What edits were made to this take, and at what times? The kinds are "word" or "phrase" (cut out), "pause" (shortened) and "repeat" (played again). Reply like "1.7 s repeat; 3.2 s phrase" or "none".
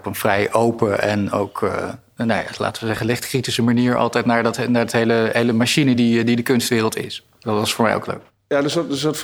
none